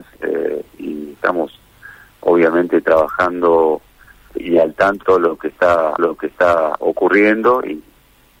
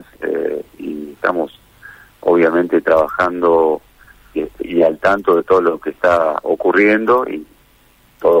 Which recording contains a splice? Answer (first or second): first